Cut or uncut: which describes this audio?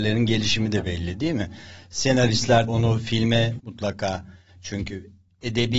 cut